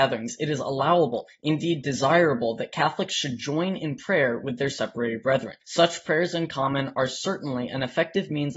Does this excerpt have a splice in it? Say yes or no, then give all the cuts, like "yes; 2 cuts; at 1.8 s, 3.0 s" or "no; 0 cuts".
yes; 1 cut; at 5.6 s